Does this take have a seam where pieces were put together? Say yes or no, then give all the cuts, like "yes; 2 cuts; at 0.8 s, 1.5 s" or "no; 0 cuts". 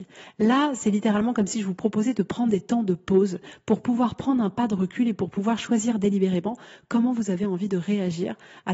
no; 0 cuts